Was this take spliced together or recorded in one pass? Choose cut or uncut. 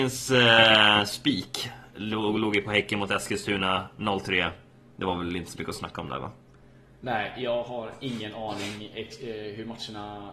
uncut